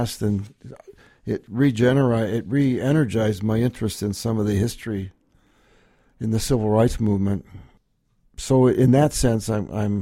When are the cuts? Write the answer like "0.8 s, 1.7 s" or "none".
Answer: none